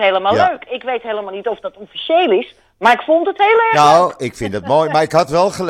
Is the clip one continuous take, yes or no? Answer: yes